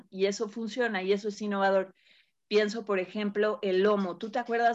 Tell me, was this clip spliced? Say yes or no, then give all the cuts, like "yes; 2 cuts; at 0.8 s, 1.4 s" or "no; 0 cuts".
no; 0 cuts